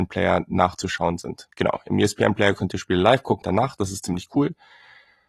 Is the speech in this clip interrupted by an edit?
yes; 2 cuts; at 1.5 s, 3.4 s

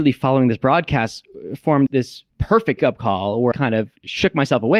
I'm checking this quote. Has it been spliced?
yes; 3 cuts; at 1.9 s, 2.8 s, 3.5 s

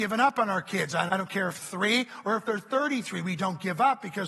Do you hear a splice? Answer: yes; 2 cuts; at 1.1 s, 1.6 s

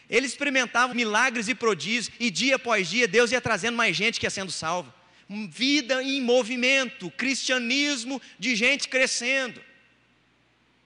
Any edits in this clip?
yes; 1 cut; at 0.9 s

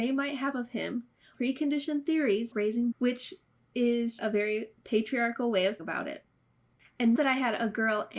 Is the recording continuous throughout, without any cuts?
no; 6 cuts; at 1.3 s, 2.5 s, 2.9 s, 4.2 s, 5.8 s, 7.2 s

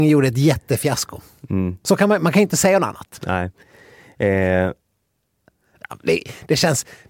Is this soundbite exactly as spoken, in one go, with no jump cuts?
yes; 0 cuts

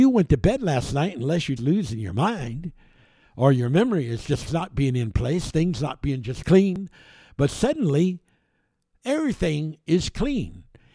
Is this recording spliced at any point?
yes; 3 cuts; at 1.6 s, 4.5 s, 6.4 s

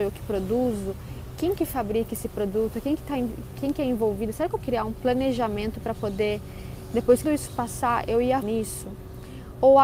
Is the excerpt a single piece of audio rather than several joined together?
no; 3 cuts; at 4.6 s, 7.2 s, 8.4 s

